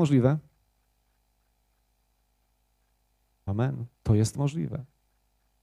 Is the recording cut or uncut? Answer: cut